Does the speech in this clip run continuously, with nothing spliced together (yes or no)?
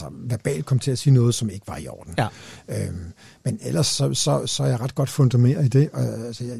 yes